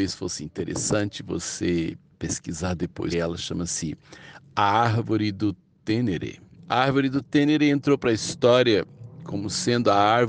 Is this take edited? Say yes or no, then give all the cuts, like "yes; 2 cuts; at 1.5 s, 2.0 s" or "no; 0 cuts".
yes; 2 cuts; at 3.1 s, 6.6 s